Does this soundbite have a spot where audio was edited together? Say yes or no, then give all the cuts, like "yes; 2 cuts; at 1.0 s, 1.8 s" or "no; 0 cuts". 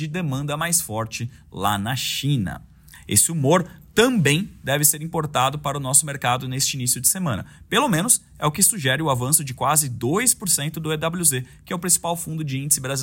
no; 0 cuts